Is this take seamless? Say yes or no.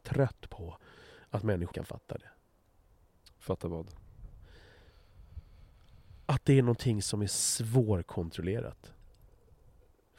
no